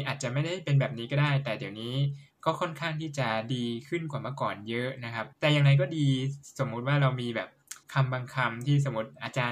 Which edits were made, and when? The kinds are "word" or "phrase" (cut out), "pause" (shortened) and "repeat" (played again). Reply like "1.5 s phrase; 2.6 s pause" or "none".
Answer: 5.3 s pause; 7.8 s pause